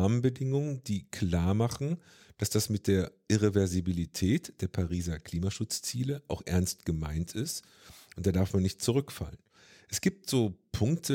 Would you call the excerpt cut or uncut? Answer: uncut